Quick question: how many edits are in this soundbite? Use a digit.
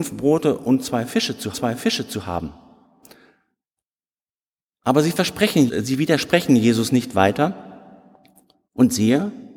2